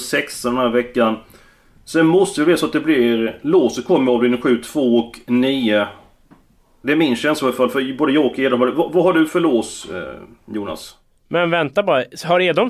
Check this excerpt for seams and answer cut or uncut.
uncut